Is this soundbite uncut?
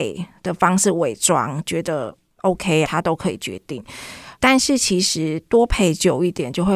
no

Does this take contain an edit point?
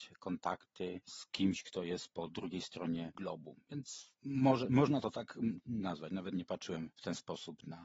no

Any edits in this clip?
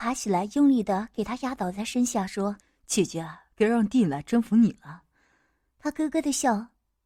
yes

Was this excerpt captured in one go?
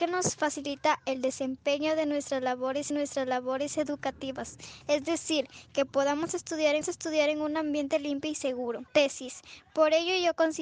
no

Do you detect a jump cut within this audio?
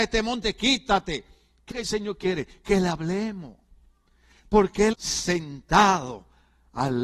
yes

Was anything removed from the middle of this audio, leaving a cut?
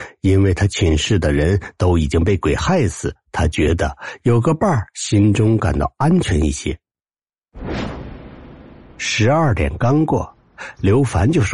no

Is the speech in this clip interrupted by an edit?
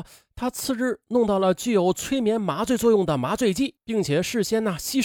yes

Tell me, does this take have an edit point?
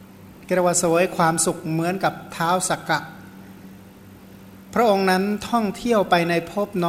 no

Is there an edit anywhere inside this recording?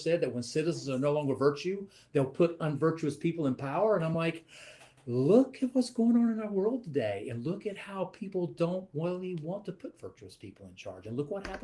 no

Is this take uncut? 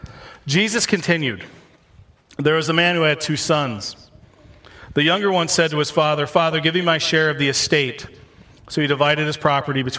yes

